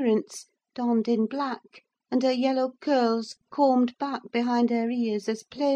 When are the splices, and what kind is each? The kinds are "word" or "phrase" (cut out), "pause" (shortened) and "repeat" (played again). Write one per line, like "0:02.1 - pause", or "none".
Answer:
0:01.9 - pause